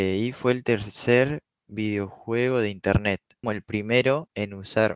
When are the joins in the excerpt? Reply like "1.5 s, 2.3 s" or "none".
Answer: 3.4 s